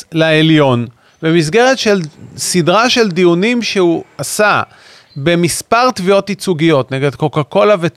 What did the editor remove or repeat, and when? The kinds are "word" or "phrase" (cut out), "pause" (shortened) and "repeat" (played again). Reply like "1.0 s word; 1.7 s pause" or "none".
none